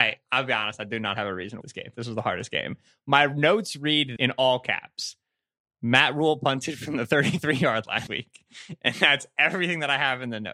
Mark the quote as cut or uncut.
cut